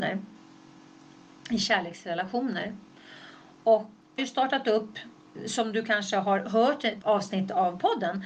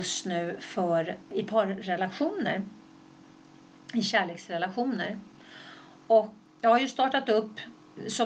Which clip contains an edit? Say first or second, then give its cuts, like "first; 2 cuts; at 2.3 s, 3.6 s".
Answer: first; 2 cuts; at 4.2 s, 7.0 s